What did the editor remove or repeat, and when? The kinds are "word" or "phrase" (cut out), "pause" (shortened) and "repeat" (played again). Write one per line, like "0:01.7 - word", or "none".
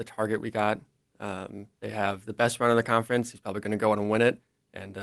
0:01.7 - pause

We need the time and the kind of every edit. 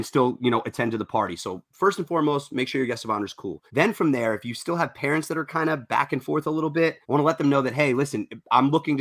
0:03.7 - pause
0:07.0 - pause

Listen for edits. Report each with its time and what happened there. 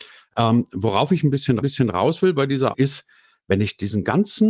0:01.6 - repeat
0:02.7 - word

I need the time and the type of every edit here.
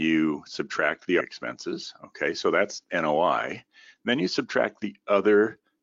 0:01.2 - word

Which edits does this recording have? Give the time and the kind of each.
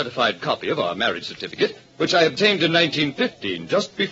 none

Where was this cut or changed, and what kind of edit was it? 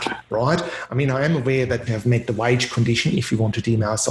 0:01.9 - phrase

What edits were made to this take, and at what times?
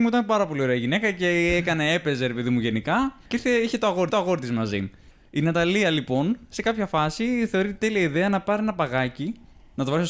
0:03.3 - pause
0:04.1 - repeat

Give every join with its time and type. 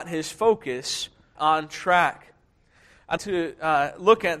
0:01.4 - word
0:03.2 - word

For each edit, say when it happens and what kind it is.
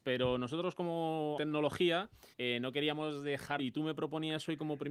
0:01.4 - phrase
0:02.3 - pause
0:03.6 - phrase

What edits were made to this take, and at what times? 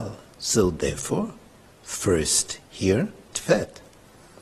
0:01.6 - pause
0:03.3 - word

